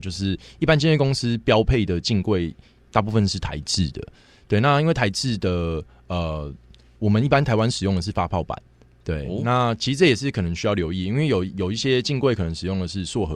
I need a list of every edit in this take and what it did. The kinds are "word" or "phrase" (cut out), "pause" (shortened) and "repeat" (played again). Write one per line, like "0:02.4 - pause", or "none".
none